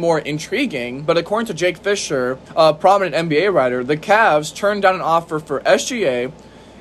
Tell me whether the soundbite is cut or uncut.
cut